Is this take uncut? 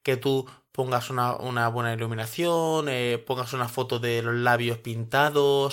yes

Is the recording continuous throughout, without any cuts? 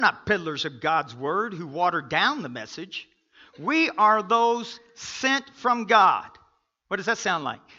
yes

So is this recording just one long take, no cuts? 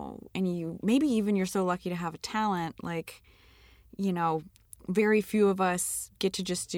yes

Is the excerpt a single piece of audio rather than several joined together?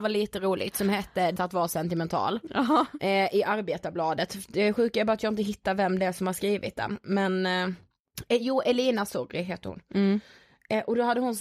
no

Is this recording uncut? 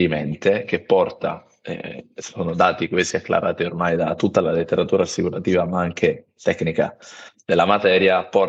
yes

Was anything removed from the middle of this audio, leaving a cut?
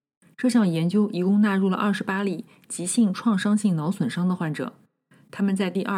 no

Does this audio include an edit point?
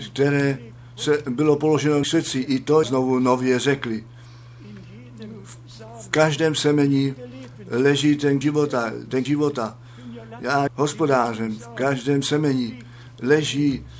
yes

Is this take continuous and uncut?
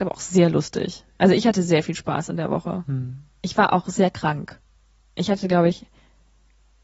yes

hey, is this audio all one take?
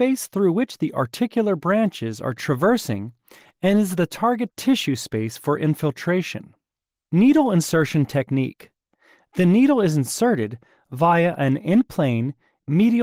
yes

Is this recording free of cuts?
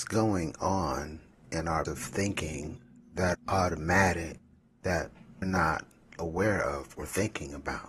no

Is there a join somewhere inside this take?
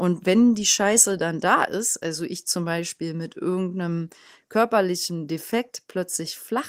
no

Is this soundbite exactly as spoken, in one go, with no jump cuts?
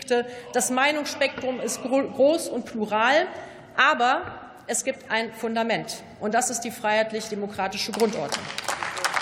yes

